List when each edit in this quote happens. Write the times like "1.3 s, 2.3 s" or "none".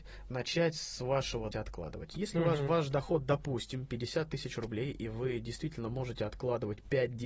1.5 s